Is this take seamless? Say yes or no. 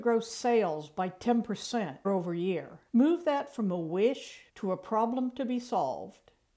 no